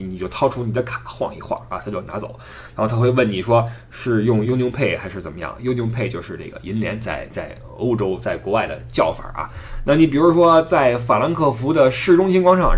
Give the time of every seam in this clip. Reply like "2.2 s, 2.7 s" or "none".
none